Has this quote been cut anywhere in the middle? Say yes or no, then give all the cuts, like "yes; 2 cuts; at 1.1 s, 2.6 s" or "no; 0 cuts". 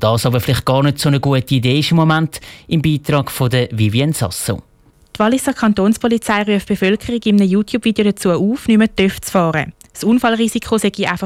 no; 0 cuts